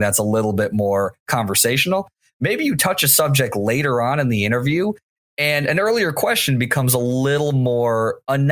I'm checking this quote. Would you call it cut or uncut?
uncut